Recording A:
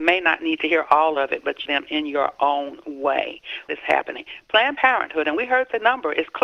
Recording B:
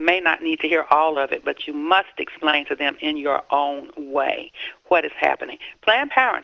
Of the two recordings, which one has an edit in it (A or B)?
A